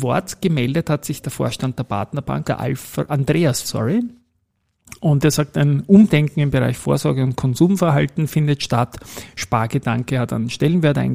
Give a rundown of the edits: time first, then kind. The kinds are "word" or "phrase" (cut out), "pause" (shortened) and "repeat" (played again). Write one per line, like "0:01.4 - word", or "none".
0:02.4 - word
0:03.6 - word